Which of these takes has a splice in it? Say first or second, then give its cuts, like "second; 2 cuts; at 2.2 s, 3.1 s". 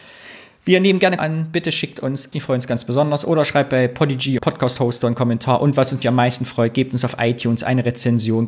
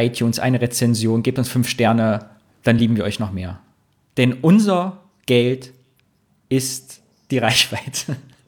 first; 4 cuts; at 1.2 s, 2.3 s, 4.4 s, 6.0 s